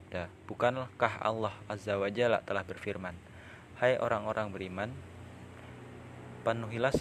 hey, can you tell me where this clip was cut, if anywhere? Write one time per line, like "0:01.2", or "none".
none